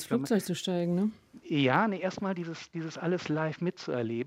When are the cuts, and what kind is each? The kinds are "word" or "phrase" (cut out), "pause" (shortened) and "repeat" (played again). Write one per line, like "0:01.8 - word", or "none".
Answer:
none